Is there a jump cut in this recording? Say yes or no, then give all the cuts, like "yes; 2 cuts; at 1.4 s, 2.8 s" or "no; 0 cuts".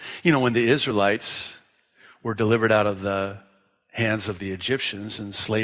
no; 0 cuts